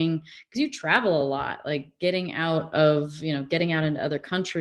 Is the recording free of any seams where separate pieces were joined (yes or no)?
yes